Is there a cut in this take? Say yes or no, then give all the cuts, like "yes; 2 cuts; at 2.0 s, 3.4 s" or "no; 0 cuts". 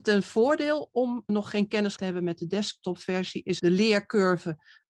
yes; 3 cuts; at 1.3 s, 2.0 s, 3.6 s